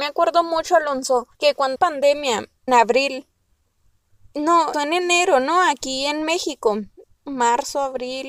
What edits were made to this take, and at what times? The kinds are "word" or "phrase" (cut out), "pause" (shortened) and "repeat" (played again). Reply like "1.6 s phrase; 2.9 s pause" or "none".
1.3 s pause; 1.8 s phrase; 2.7 s word; 4.7 s word; 7.0 s pause